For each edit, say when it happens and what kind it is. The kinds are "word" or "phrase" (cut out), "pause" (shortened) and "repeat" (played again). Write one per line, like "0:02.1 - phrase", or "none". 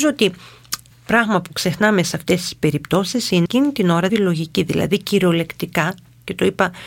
0:00.9 - word
0:03.5 - word
0:04.1 - phrase